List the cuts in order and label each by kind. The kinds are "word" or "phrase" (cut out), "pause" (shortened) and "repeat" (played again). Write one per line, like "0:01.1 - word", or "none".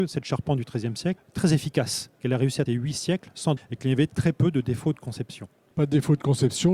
0:01.2 - word
0:02.7 - word
0:03.6 - word